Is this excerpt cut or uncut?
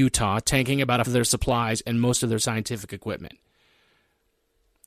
cut